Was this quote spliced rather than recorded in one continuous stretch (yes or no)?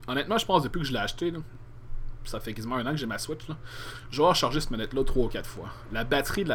no